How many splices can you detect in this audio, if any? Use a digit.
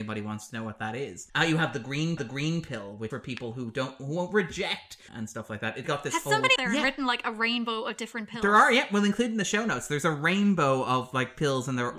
6